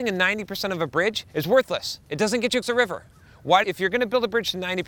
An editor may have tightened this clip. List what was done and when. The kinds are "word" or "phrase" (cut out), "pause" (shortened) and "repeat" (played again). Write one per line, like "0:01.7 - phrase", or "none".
0:01.3 - pause
0:02.6 - word
0:03.6 - word